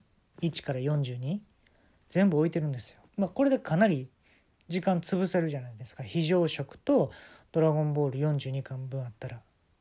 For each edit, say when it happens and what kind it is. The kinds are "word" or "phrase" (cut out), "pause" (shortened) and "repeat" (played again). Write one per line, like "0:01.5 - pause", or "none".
0:03.1 - pause